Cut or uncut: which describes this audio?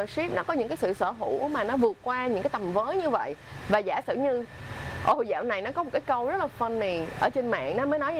uncut